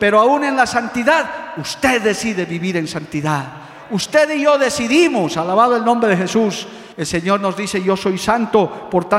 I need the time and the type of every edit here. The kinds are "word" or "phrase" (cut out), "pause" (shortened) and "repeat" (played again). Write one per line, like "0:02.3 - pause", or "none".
0:06.9 - pause